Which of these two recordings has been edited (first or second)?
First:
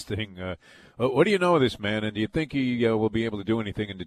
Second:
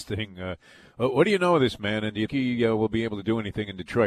second